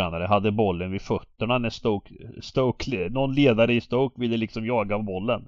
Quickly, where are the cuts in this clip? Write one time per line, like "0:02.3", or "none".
none

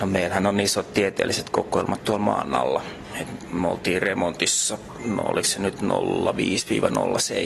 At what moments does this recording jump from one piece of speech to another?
none

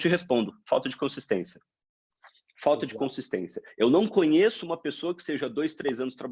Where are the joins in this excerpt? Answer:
none

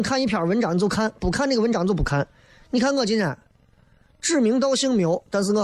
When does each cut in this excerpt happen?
none

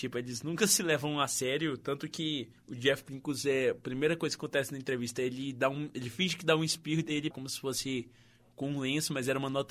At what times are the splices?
0:02.6
0:07.3

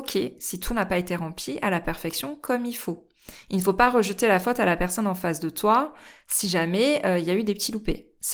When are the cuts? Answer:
none

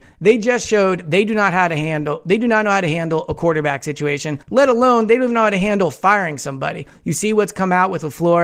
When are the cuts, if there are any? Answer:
0:04.4

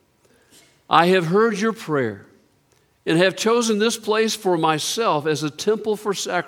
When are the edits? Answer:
none

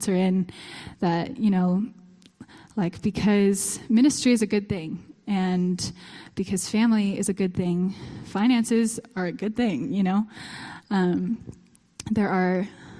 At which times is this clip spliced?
none

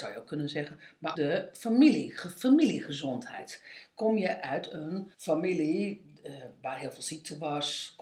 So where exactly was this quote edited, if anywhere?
0:01.1
0:05.1

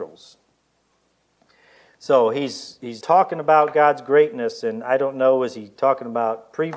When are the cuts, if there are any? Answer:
0:03.0

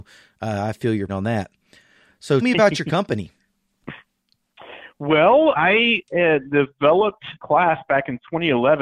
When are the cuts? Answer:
0:01.1
0:02.4
0:05.5
0:07.4

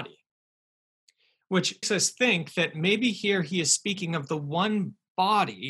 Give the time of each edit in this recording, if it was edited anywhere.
0:01.8

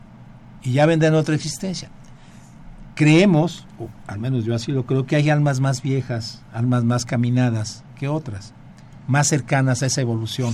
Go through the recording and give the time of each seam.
none

